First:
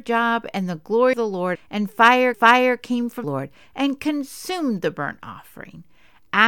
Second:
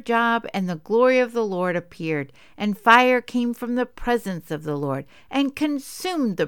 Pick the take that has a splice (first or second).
first